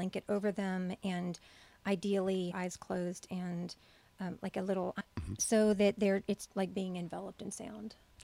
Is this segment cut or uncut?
cut